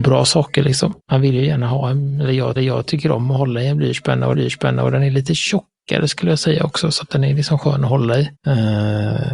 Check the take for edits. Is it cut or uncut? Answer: cut